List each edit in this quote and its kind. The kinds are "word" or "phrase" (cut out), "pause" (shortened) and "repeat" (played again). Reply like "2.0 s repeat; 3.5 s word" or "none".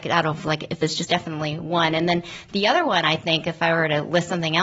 1.1 s phrase